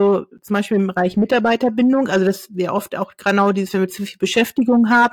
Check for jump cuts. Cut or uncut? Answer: uncut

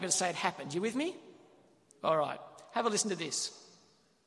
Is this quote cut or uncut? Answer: uncut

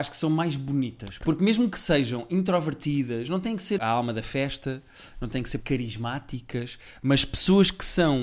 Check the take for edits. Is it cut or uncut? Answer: cut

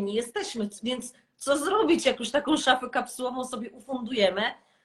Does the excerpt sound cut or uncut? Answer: uncut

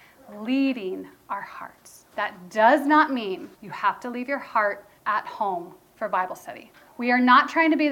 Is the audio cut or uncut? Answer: cut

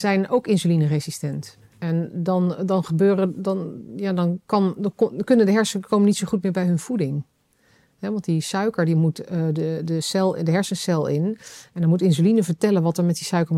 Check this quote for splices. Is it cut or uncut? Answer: cut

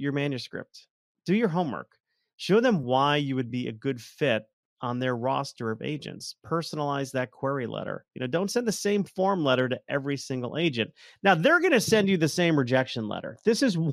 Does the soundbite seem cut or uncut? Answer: uncut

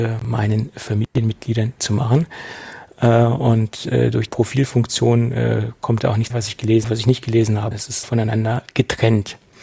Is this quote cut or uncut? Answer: cut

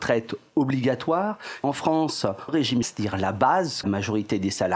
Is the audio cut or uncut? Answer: cut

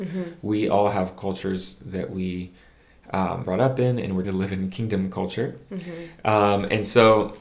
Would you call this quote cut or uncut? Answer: cut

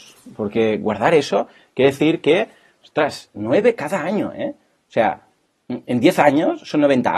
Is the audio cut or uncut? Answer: uncut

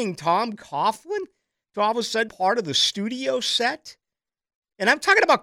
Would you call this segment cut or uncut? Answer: cut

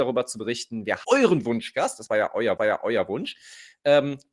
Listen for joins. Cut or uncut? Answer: cut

